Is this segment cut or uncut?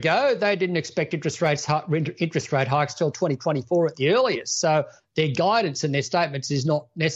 uncut